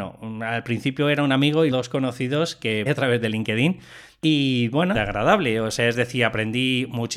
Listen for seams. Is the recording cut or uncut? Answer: cut